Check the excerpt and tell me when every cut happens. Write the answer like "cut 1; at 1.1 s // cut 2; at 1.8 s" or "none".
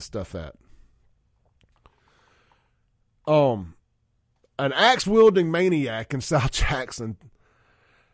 none